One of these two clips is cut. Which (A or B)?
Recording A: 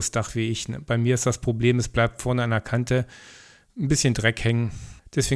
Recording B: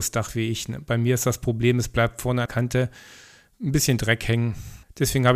B